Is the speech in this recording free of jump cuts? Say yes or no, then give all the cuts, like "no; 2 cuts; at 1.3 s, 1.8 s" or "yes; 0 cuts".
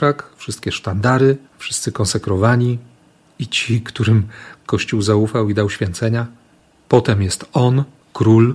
no; 1 cut; at 1.5 s